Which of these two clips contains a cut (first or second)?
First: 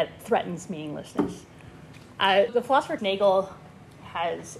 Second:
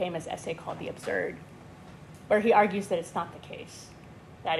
first